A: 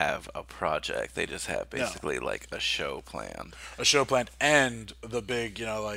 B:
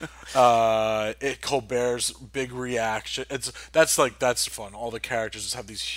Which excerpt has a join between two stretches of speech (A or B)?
B